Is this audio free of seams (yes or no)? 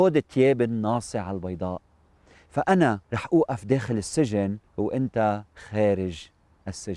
no